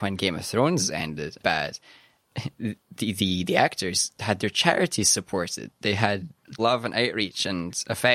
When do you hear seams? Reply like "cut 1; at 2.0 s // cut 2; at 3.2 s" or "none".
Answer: cut 1; at 1.4 s // cut 2; at 2.8 s // cut 3; at 6.6 s